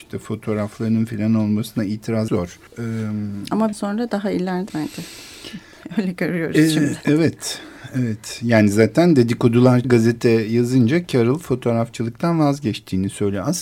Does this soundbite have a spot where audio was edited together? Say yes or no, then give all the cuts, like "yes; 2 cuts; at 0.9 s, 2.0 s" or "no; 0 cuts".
yes; 5 cuts; at 2.3 s, 2.7 s, 3.7 s, 4.7 s, 9.8 s